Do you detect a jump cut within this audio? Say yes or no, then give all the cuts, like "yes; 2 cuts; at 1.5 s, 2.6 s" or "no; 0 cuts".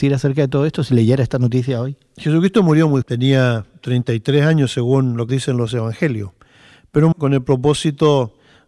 yes; 3 cuts; at 3.0 s, 5.3 s, 7.1 s